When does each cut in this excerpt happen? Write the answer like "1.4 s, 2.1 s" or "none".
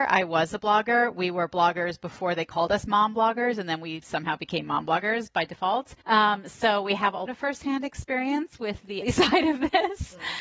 6.0 s, 7.3 s, 9.0 s

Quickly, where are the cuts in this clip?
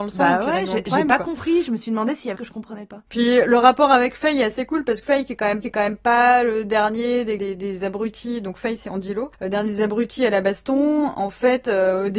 2.3 s, 3.1 s, 5.0 s, 5.6 s, 7.4 s

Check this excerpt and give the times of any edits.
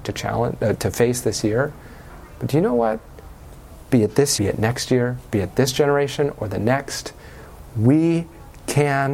4.4 s

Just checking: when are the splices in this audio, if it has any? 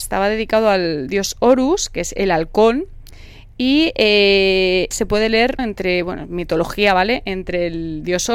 4.9 s, 5.6 s

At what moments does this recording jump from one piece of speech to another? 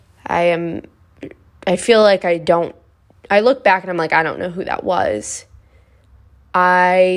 none

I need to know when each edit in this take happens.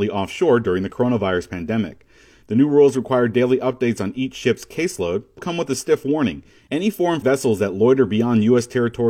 5.4 s, 7.2 s

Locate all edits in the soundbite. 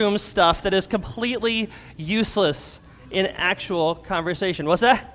none

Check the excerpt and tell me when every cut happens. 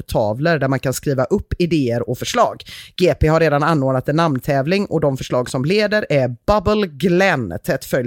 none

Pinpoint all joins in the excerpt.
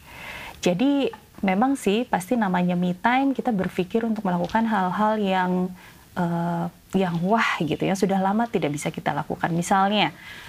none

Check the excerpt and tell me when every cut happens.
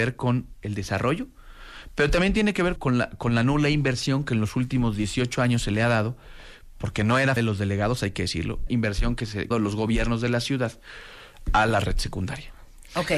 2.8 s, 7.4 s, 8.7 s, 9.5 s

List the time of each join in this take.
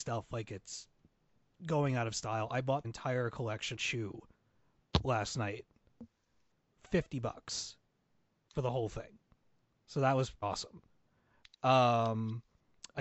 2.8 s, 3.8 s, 6.8 s, 10.4 s

